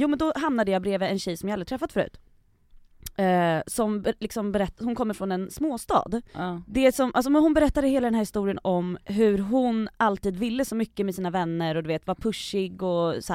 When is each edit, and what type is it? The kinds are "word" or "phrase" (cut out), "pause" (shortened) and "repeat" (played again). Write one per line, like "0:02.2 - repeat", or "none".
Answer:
0:06.3 - pause
0:09.0 - pause